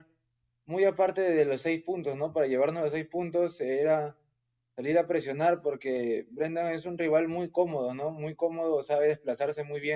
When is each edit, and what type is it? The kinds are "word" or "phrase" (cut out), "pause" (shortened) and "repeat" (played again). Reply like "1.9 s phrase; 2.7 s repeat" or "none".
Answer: none

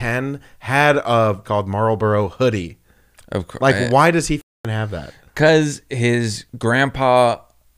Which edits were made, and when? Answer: 1.4 s phrase; 6.5 s pause

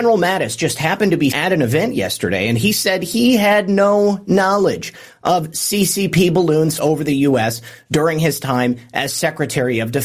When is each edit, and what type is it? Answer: 1.3 s word; 6.8 s word

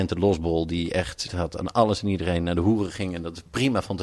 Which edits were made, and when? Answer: 1.3 s word

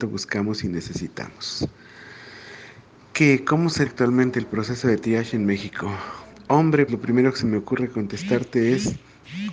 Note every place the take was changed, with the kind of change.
3.9 s word; 6.9 s word

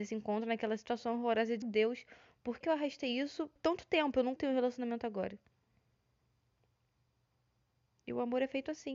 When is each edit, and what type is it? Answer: 1.6 s word; 2.6 s word; 3.6 s word; 4.4 s word

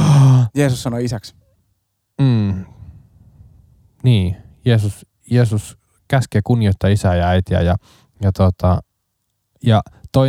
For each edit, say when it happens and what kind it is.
none

